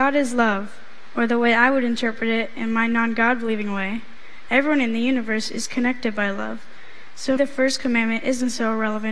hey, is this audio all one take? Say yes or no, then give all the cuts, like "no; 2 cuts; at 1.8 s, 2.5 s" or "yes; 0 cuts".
no; 1 cut; at 7.4 s